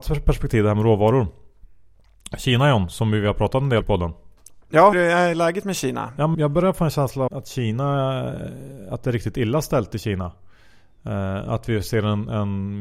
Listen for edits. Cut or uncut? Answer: cut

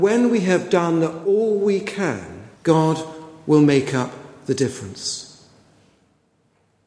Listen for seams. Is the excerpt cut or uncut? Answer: cut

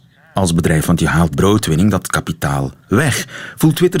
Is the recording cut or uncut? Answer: cut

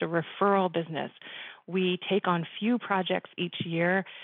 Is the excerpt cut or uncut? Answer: uncut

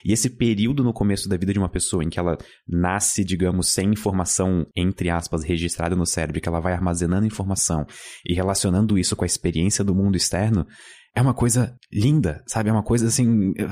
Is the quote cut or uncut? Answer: uncut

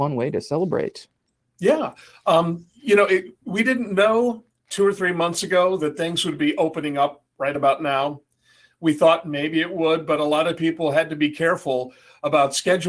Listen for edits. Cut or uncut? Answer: uncut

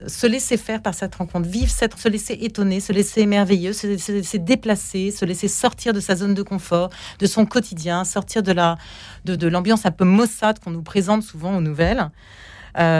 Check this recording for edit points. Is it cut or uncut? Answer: cut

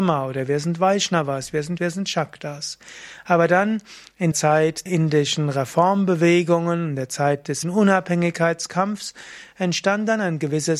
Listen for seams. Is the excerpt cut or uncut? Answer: cut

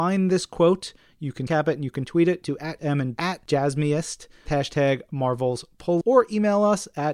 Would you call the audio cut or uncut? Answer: cut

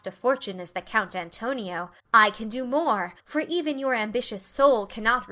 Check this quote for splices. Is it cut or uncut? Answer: cut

